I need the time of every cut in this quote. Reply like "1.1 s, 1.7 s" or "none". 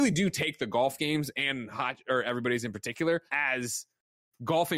3.3 s